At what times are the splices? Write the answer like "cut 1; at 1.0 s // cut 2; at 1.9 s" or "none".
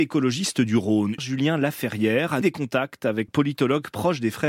cut 1; at 1.2 s // cut 2; at 2.4 s // cut 3; at 3.3 s